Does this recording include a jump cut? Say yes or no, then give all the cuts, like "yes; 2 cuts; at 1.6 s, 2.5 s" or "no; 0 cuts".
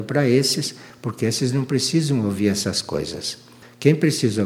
no; 0 cuts